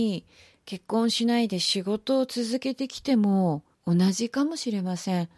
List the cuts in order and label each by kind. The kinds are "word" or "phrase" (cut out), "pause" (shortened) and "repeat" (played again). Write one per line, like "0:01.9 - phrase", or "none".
0:03.7 - pause